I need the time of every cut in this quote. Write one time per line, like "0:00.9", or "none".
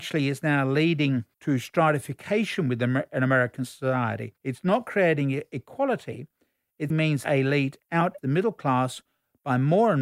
0:01.3
0:04.4
0:06.9
0:07.2
0:08.2